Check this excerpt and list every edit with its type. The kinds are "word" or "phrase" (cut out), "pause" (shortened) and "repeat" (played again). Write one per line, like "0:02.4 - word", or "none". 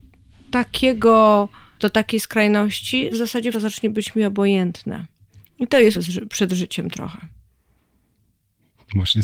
0:01.8 - word
0:03.1 - word
0:03.5 - word
0:05.9 - phrase